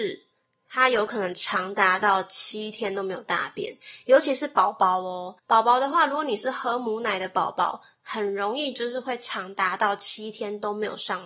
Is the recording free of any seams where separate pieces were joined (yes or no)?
no